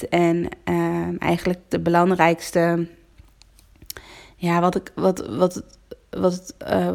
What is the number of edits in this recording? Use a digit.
0